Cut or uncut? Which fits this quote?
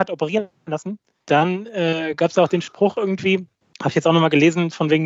cut